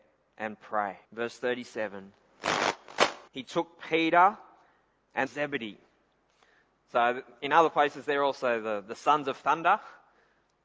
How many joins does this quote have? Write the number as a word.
three